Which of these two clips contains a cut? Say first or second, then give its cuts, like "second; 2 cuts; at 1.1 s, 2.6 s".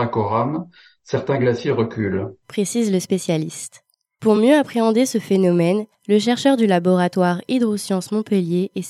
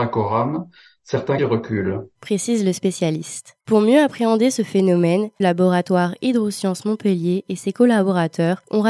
second; 3 cuts; at 1.4 s, 3.6 s, 5.4 s